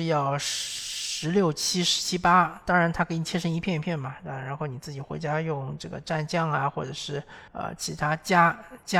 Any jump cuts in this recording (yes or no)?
yes